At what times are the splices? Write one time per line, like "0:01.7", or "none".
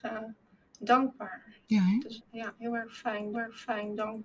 0:02.2
0:03.3